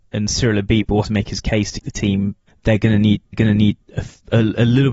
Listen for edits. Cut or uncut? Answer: cut